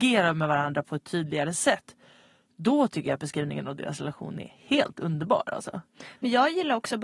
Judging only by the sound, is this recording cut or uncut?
uncut